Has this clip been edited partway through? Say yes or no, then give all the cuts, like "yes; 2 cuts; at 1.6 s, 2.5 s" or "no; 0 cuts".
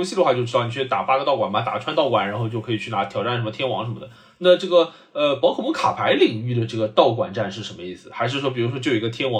no; 0 cuts